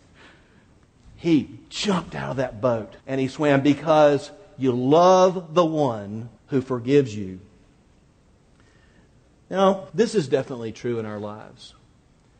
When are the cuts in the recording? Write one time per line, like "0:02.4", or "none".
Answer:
0:03.0
0:06.4
0:09.9